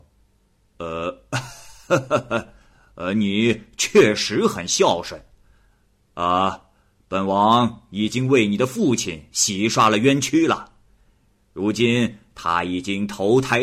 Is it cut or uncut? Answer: uncut